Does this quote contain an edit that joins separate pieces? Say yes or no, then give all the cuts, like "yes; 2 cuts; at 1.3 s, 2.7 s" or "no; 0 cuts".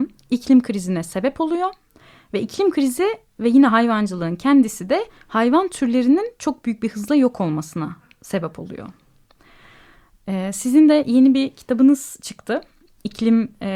no; 0 cuts